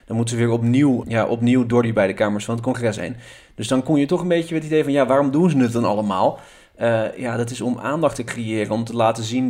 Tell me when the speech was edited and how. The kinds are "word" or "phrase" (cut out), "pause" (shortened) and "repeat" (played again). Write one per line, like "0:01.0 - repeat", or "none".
0:01.0 - word